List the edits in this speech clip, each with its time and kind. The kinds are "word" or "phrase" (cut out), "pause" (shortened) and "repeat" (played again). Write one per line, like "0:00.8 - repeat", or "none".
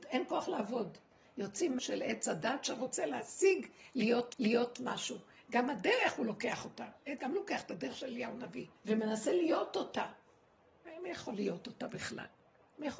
0:01.8 - word
0:04.3 - repeat
0:07.2 - word
0:08.8 - pause